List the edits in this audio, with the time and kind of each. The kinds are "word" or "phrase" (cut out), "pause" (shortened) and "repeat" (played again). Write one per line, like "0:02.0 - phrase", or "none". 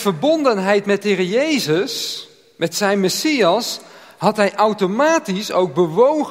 none